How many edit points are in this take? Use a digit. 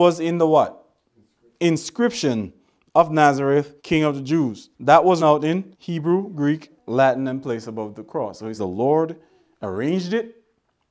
7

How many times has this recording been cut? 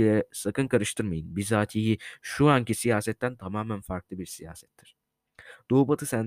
0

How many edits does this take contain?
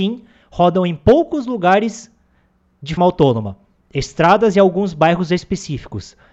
1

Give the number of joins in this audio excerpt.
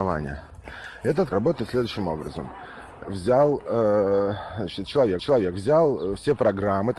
3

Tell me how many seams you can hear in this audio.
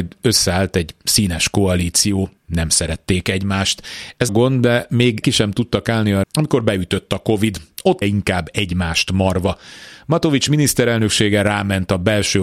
5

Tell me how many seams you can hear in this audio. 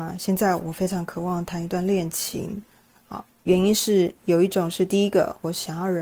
1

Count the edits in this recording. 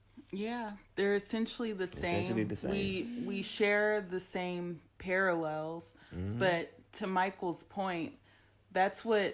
1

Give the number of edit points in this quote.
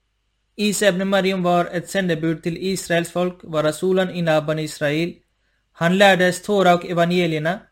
0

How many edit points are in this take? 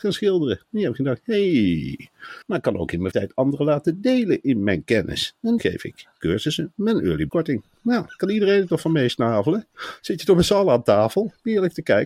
4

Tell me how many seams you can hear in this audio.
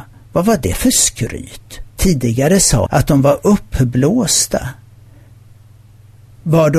2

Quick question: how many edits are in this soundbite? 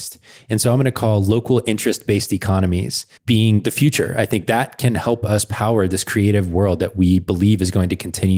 1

